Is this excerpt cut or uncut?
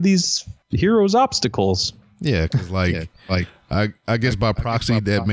uncut